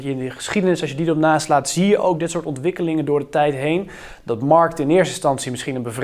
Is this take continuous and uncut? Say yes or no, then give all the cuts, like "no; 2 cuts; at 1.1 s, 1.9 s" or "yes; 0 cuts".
yes; 0 cuts